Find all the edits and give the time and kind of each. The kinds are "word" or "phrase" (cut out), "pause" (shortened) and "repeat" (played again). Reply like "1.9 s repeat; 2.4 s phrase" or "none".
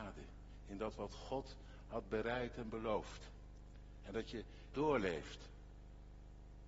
4.7 s word